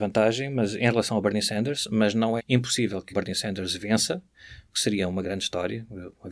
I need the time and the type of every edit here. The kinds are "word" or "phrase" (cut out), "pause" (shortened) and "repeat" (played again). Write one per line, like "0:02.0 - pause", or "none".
0:02.4 - word
0:03.1 - word
0:05.2 - word